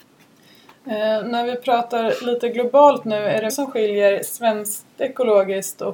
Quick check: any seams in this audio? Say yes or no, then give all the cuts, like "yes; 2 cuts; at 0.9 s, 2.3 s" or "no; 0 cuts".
yes; 1 cut; at 3.5 s